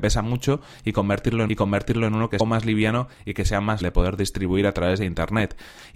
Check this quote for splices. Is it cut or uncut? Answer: cut